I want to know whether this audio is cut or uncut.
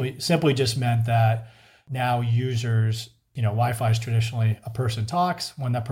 uncut